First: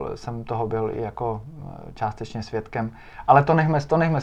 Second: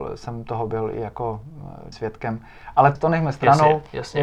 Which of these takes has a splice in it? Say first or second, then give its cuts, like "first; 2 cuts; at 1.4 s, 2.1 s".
second; 2 cuts; at 1.9 s, 3.0 s